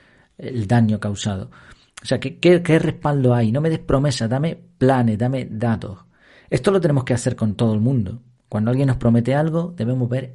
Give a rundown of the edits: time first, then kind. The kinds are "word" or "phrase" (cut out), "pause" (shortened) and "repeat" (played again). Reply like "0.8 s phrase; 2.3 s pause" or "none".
none

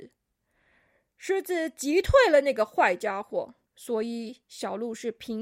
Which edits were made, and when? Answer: 3.7 s pause

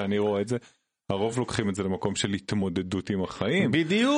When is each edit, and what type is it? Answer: none

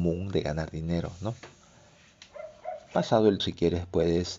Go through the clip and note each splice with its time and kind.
3.4 s word

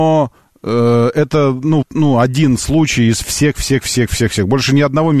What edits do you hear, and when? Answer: 1.8 s word

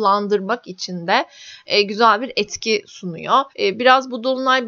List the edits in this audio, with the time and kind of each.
3.5 s pause

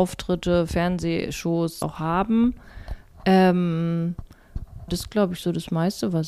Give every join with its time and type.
1.8 s word; 4.9 s word

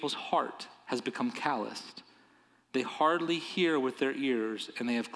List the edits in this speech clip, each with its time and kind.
none

